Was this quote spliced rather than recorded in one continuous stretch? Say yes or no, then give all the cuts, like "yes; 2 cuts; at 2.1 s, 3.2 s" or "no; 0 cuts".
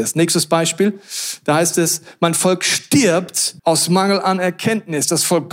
yes; 1 cut; at 3.6 s